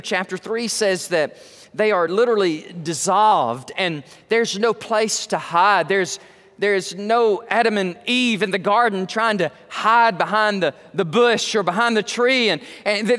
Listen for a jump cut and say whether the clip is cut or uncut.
uncut